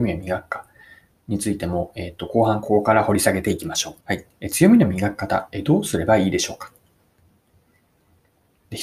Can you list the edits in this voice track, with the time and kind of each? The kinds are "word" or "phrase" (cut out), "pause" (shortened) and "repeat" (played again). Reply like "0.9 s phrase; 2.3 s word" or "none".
4.0 s pause